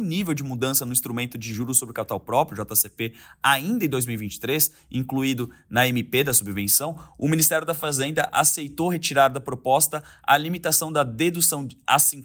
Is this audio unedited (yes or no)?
yes